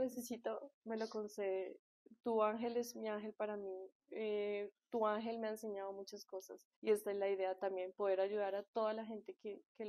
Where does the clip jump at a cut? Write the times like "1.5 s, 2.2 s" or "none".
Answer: 6.8 s